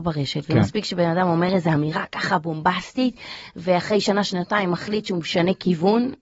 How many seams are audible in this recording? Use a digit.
0